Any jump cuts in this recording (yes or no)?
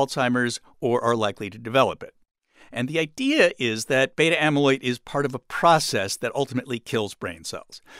no